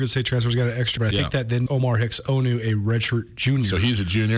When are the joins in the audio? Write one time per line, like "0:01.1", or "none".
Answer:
0:01.0
0:01.7

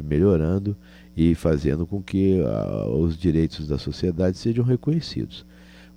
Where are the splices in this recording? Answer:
none

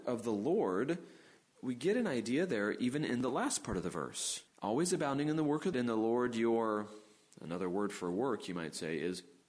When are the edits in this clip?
0:04.5
0:05.7

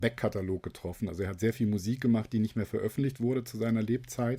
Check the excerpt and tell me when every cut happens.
none

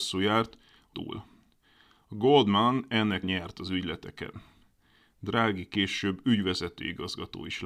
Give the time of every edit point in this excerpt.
0:00.9
0:03.2

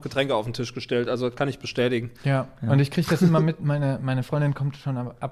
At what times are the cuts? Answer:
none

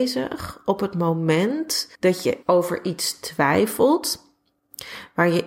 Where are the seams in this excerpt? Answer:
0:01.9
0:02.4

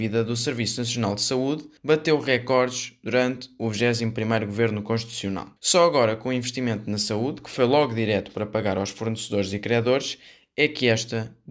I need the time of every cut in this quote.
0:01.8
0:05.6

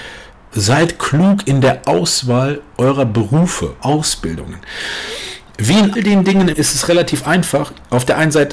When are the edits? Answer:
0:03.8
0:06.0
0:06.5

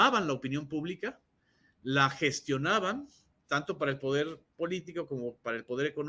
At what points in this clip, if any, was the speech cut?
none

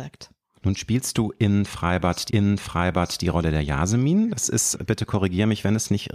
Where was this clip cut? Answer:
0:02.3
0:04.7

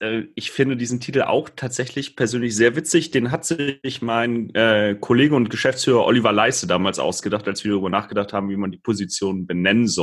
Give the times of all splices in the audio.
none

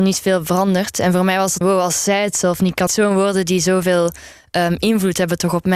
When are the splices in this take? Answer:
0:01.6
0:02.9

